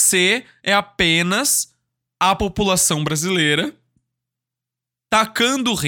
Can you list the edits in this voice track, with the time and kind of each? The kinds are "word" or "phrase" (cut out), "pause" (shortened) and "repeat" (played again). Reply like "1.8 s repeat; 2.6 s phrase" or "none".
none